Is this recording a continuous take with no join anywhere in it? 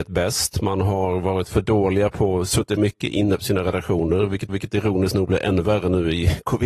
no; 2 cuts; at 2.8 s, 4.5 s

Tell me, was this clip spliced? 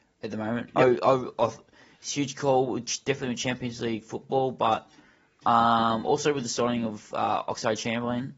no; 0 cuts

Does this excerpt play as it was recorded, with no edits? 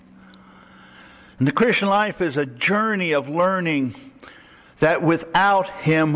yes; 0 cuts

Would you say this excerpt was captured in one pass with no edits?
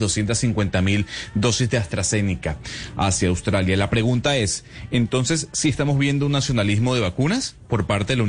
yes; 0 cuts

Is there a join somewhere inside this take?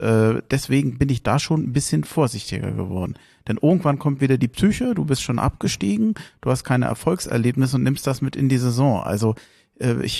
no; 0 cuts

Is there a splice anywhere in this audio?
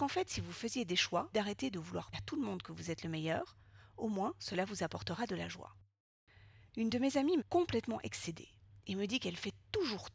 yes; 3 cuts; at 1.3 s, 2.1 s, 7.4 s

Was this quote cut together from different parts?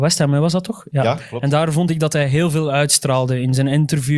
no; 0 cuts

